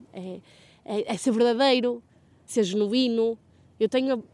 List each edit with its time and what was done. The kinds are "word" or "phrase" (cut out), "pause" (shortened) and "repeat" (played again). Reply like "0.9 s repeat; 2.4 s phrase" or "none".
2.5 s word